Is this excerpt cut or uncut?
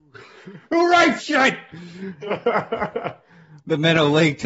cut